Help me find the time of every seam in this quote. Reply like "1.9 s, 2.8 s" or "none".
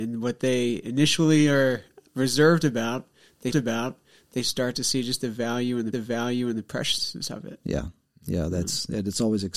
3.5 s, 5.9 s

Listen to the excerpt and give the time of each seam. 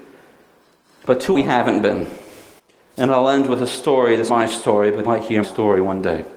1.3 s, 2.6 s, 4.3 s, 5.1 s, 5.4 s

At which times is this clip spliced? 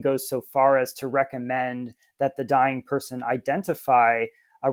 none

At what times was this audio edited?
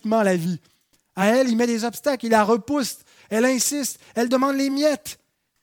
none

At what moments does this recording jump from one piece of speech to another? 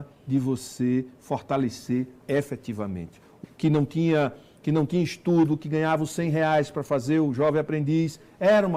2.2 s, 3.4 s

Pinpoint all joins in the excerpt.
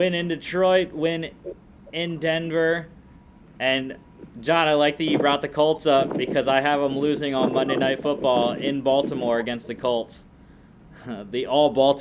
none

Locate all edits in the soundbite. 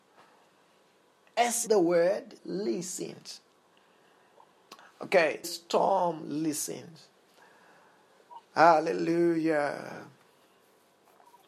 1.7 s, 2.4 s, 5.4 s, 8.4 s

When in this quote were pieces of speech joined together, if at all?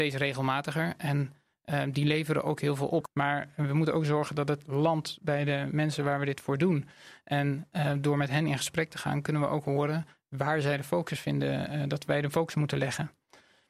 none

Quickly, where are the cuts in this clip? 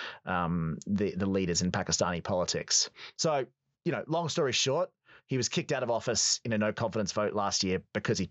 none

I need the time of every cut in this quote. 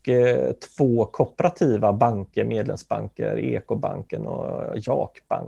none

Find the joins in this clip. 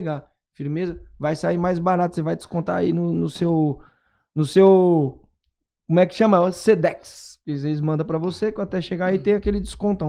none

